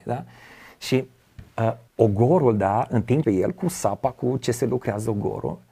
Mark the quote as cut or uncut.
cut